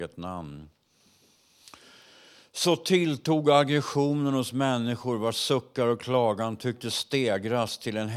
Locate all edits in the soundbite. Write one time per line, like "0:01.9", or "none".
none